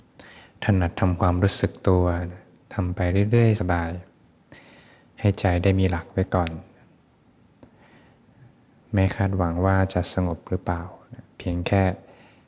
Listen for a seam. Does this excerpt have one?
yes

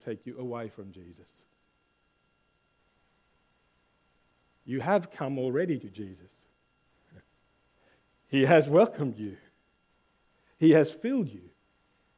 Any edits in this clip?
no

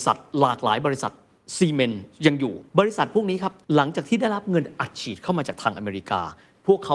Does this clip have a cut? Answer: yes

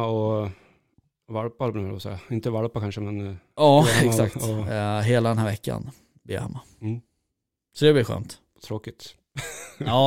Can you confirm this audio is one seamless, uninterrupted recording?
yes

